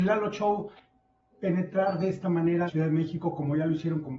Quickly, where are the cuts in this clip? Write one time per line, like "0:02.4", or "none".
0:02.7